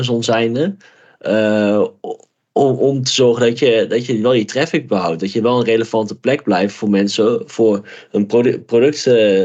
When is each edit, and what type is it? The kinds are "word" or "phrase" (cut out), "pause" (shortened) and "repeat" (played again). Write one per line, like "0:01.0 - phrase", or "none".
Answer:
none